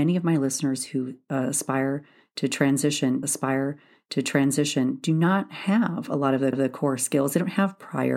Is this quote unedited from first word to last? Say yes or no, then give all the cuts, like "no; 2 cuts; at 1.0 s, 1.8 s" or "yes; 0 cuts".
no; 2 cuts; at 3.2 s, 6.5 s